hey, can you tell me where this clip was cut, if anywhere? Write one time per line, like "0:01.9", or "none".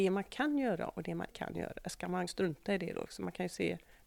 0:01.3
0:02.3